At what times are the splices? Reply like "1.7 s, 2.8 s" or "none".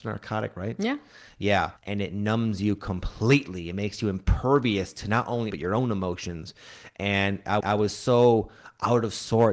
1.8 s, 5.5 s, 7.6 s